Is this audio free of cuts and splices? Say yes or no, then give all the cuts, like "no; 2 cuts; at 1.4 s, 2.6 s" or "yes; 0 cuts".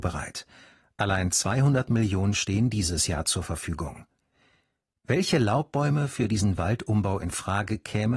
yes; 0 cuts